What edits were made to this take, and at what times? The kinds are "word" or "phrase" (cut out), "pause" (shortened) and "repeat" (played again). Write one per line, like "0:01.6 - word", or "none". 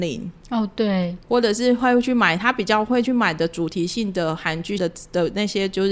0:04.8 - phrase